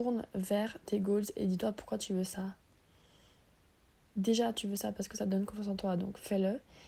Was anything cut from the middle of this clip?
no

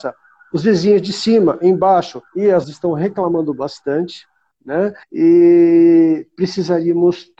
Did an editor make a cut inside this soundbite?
yes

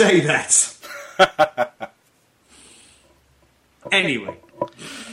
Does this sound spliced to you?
no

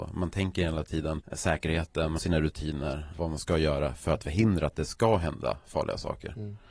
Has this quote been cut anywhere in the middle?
yes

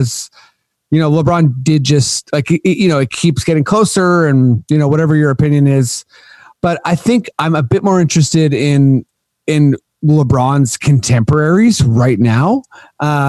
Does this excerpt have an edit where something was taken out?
no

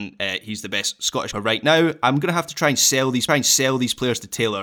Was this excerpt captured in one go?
no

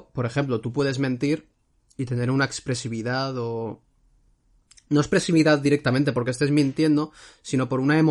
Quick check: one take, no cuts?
yes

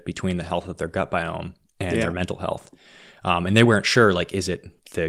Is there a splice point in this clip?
no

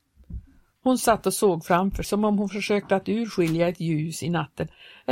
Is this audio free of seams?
no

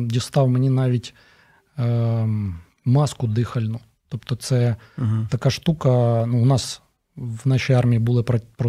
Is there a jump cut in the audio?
no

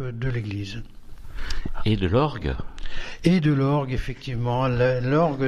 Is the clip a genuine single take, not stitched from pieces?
yes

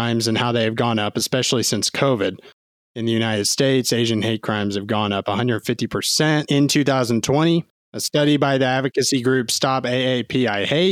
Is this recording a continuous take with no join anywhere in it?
yes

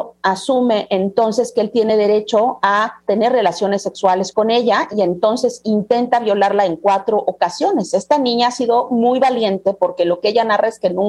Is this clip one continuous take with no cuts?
yes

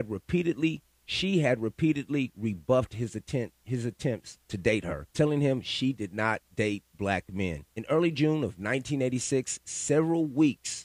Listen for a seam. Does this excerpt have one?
yes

